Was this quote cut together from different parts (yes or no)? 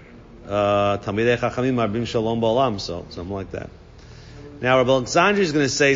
no